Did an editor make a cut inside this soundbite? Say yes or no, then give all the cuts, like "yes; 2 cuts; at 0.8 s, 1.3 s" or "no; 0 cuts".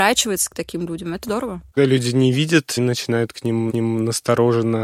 yes; 4 cuts; at 1.2 s, 1.8 s, 2.8 s, 3.7 s